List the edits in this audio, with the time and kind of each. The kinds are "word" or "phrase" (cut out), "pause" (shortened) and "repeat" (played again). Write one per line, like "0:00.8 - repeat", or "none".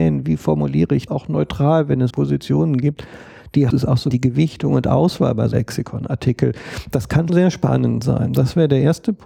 0:01.1 - word
0:02.1 - word
0:03.7 - word
0:04.1 - word
0:05.5 - word
0:07.3 - word